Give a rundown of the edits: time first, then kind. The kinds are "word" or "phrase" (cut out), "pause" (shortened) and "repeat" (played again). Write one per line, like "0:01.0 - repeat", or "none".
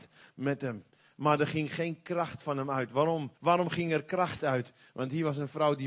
0:03.3 - pause